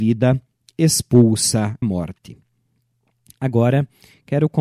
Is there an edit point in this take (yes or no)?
yes